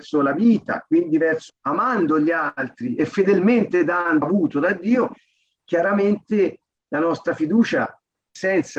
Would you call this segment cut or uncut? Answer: cut